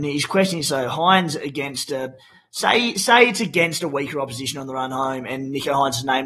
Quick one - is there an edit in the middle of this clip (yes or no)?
no